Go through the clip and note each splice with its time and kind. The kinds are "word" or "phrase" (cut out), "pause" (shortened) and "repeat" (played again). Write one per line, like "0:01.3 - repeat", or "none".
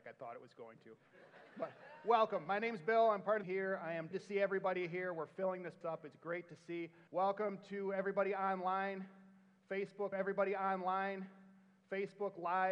0:03.4 - phrase
0:04.1 - word
0:05.8 - word
0:07.1 - pause
0:10.1 - repeat